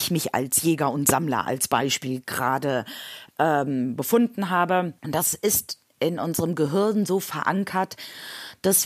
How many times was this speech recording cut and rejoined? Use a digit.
1